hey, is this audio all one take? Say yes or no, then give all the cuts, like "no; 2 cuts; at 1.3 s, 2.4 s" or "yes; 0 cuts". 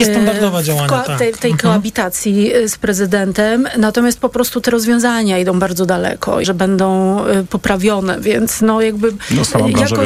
no; 1 cut; at 6.4 s